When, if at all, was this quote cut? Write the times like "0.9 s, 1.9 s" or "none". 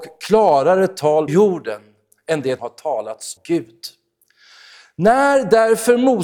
1.3 s, 2.6 s, 3.4 s